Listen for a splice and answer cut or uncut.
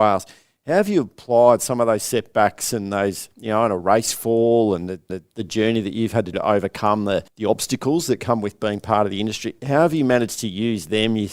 cut